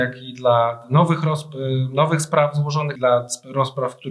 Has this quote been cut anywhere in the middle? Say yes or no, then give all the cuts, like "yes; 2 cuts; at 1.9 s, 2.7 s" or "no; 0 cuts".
yes; 1 cut; at 3.0 s